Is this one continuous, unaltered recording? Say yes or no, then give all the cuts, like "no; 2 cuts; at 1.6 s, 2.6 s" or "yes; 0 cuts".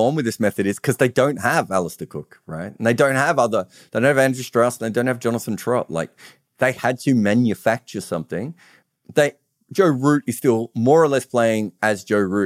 yes; 0 cuts